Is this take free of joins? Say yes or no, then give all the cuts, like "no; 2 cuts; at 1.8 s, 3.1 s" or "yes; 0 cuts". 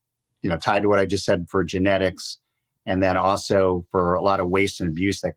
yes; 0 cuts